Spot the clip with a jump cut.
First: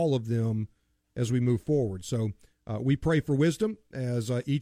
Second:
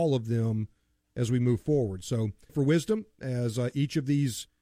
second; 1 cut; at 2.5 s

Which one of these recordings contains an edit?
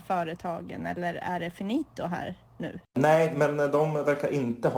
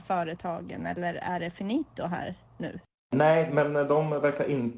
first; 1 cut; at 2.9 s

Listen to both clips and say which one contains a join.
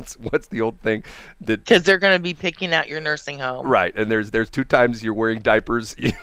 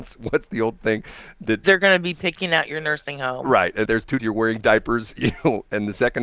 second; 3 cuts; at 1.6 s, 3.9 s, 4.2 s

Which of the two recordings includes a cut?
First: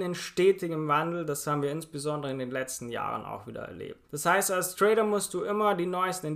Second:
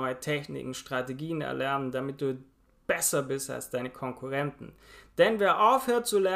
first; 1 cut; at 4.0 s

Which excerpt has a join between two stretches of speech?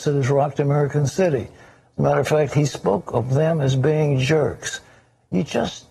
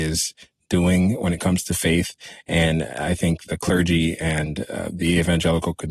second; 1 cut; at 3.5 s

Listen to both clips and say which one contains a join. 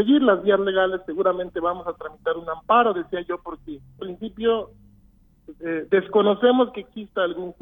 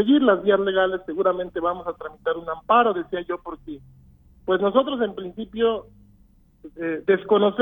first; 1 cut; at 4.0 s

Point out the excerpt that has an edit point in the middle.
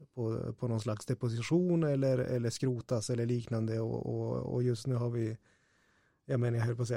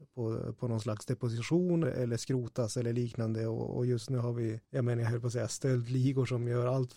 second; 3 cuts; at 1.8 s, 3.7 s, 4.6 s

